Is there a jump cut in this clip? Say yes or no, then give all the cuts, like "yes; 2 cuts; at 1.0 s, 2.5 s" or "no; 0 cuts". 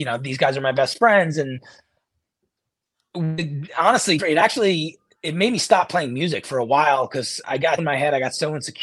yes; 4 cuts; at 4.2 s, 6.4 s, 7.4 s, 7.8 s